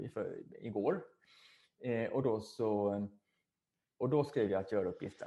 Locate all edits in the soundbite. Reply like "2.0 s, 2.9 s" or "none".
none